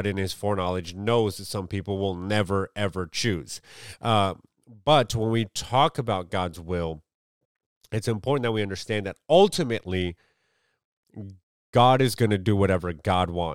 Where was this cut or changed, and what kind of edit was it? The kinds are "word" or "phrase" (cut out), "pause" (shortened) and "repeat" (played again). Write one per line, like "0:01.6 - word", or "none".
none

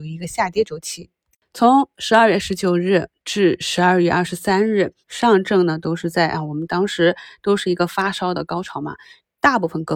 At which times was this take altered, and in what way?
0:05.0 - pause

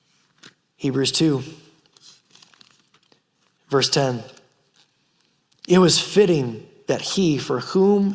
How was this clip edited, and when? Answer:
none

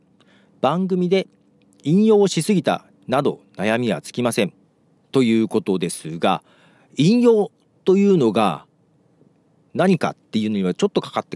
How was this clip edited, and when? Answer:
none

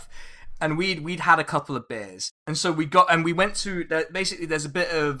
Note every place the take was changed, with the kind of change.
0:02.4 - pause

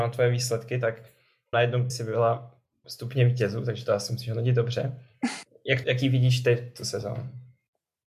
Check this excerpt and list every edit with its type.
0:01.5 - word
0:01.9 - word
0:02.8 - word
0:05.8 - word

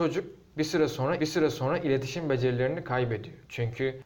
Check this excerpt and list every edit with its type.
0:01.2 - repeat

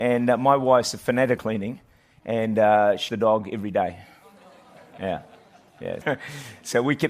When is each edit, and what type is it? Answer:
0:01.4 - word
0:03.1 - word
0:06.0 - word

